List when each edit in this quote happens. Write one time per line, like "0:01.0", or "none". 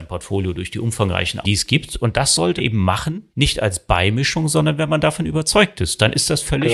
0:01.4
0:02.6
0:03.3